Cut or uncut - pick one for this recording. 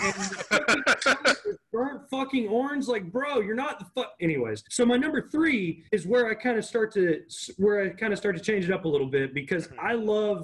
cut